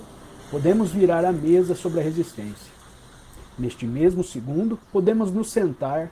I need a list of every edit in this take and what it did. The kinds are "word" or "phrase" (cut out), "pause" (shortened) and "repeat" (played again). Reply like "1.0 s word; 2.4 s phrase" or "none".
4.8 s pause